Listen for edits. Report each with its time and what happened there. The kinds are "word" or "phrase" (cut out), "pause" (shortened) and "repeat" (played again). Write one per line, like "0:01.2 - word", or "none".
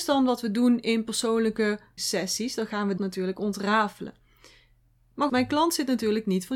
0:02.0 - word
0:03.0 - word
0:05.3 - word